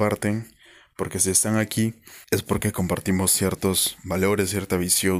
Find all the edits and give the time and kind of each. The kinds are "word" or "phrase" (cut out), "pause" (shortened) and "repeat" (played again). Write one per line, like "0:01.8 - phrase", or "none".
0:02.2 - pause